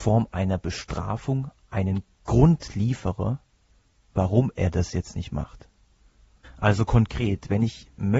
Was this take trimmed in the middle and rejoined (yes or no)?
no